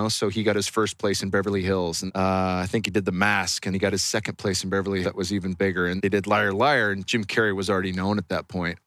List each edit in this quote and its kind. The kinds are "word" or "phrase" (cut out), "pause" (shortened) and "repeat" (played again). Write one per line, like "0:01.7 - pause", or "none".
0:02.1 - word
0:03.7 - word
0:05.0 - word
0:06.0 - word